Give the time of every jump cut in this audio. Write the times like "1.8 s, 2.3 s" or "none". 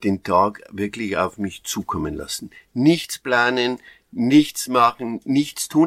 none